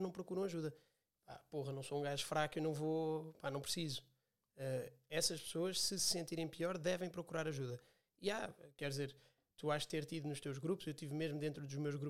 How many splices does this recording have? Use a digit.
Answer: 0